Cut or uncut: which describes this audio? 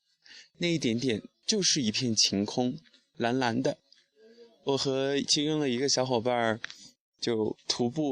uncut